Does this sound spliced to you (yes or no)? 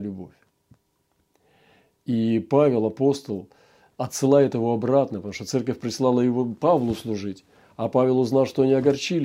no